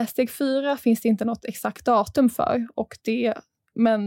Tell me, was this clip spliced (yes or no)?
no